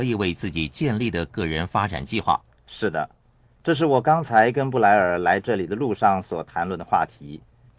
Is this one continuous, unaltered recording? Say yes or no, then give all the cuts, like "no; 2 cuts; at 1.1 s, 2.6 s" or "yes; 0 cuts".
yes; 0 cuts